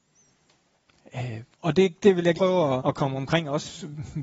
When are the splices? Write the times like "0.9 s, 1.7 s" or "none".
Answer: 1.5 s, 2.0 s, 2.3 s, 2.8 s